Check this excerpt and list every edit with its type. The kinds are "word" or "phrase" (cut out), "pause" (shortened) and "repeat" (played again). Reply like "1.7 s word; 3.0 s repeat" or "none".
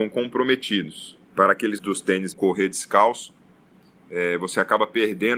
1.2 s pause; 1.8 s word; 2.3 s phrase